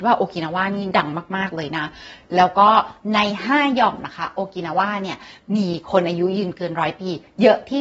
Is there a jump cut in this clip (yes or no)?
no